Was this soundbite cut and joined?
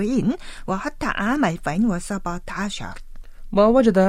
no; 0 cuts

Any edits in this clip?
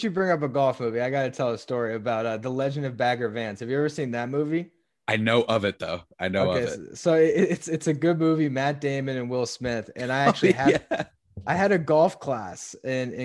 no; 0 cuts

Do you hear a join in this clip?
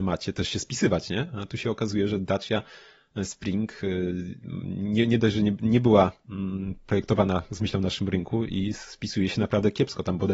no; 0 cuts

